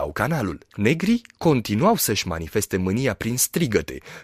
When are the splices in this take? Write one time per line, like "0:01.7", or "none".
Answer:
none